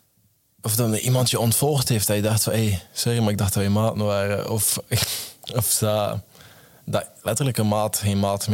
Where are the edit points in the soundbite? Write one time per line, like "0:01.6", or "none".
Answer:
none